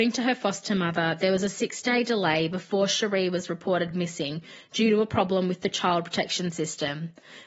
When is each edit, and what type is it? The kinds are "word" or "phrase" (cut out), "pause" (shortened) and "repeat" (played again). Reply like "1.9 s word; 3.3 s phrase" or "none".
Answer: none